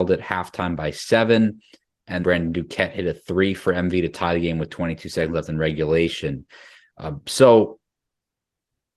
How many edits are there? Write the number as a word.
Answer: one